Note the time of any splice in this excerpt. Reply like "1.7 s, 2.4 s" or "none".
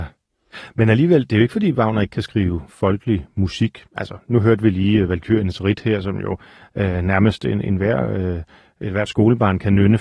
none